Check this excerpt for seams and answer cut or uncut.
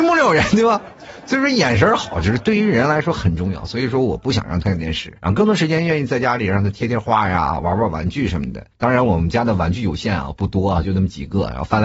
cut